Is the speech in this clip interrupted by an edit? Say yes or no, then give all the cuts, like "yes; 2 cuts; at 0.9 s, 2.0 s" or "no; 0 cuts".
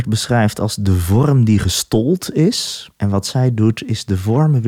yes; 1 cut; at 2.9 s